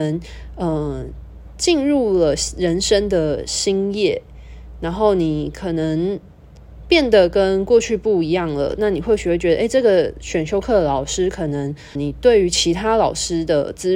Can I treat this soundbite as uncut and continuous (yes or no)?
no